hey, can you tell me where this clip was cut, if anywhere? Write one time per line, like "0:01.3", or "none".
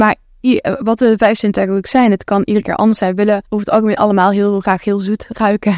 0:03.5